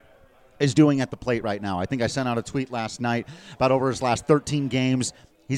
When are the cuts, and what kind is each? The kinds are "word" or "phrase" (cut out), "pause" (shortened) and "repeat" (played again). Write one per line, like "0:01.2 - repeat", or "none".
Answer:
none